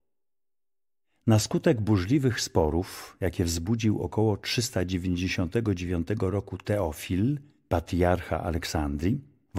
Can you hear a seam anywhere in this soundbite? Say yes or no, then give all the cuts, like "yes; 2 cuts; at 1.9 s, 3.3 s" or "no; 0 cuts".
no; 0 cuts